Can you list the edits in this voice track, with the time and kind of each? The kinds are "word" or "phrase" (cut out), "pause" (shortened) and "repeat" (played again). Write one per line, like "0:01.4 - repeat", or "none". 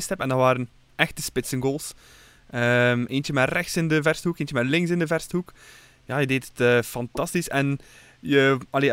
none